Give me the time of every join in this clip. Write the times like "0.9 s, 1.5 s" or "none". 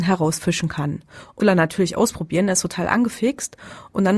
1.4 s

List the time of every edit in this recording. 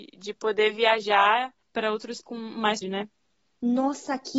1.6 s, 2.2 s, 2.8 s

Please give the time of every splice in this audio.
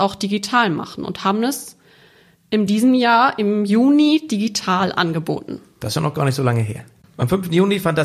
none

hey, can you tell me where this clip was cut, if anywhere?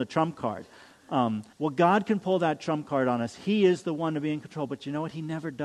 1.5 s

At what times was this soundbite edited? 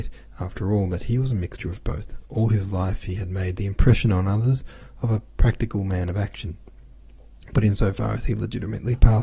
none

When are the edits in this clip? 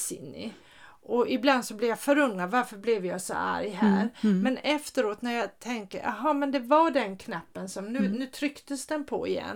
none

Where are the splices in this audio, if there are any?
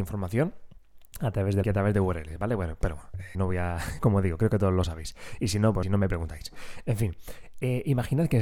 1.6 s, 3.3 s, 4.0 s, 5.8 s

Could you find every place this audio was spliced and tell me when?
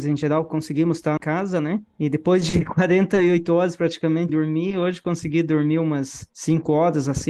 1.2 s, 4.3 s

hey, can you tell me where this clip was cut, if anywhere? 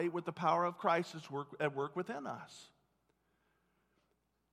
none

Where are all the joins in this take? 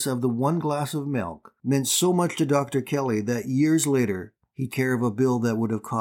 1.6 s, 4.7 s

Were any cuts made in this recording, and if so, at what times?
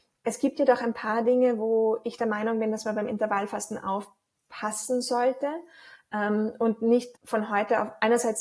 7.1 s

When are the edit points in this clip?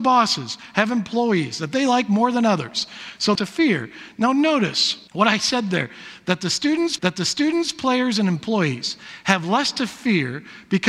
3.3 s, 5.1 s, 7.0 s

